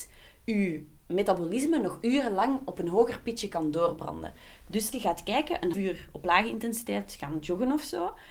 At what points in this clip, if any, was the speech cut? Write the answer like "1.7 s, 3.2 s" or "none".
4.9 s, 5.7 s